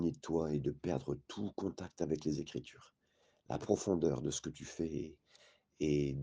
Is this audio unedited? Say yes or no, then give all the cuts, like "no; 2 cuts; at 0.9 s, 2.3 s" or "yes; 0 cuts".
yes; 0 cuts